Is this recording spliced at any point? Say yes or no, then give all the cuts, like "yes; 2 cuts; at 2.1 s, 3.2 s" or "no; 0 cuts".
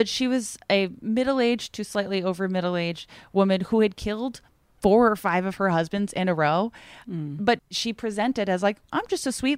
no; 0 cuts